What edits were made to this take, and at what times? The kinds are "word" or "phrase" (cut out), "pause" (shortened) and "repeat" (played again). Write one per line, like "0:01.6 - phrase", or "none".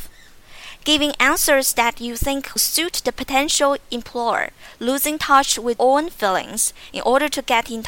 0:02.6 - word
0:05.8 - word